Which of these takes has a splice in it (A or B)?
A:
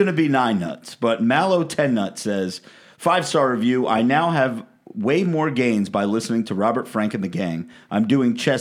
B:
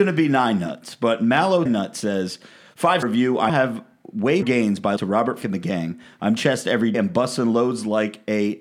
B